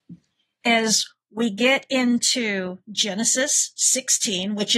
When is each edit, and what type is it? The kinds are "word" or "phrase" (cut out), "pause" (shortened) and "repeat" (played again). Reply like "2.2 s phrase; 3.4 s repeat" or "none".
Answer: none